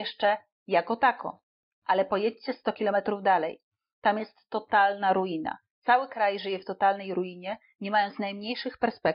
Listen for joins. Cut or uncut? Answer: uncut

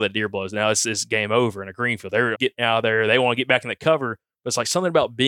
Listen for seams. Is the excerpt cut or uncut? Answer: cut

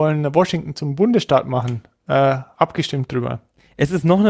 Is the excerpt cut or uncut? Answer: cut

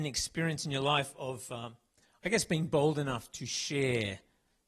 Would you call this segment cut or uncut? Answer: uncut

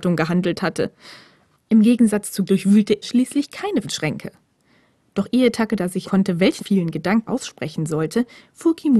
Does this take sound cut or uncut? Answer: cut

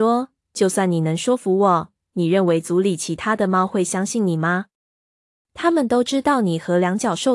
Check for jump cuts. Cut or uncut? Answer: uncut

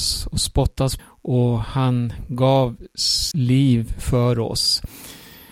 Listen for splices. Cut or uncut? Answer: cut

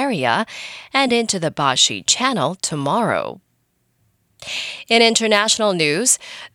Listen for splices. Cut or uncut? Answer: uncut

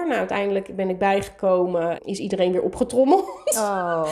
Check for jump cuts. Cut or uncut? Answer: cut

